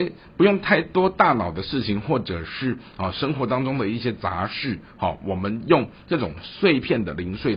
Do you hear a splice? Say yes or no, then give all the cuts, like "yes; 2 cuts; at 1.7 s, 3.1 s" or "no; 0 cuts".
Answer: no; 0 cuts